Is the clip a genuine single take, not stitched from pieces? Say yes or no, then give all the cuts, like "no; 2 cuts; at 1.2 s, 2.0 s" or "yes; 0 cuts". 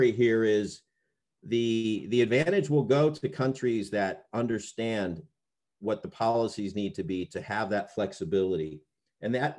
yes; 0 cuts